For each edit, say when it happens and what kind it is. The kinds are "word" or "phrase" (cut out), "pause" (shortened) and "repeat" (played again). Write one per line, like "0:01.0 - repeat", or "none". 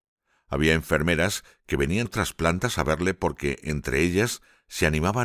0:02.1 - word